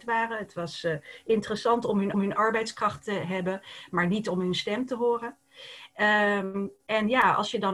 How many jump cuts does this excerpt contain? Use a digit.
1